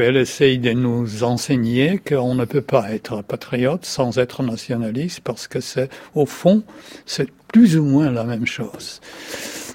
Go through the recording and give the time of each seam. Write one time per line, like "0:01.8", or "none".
none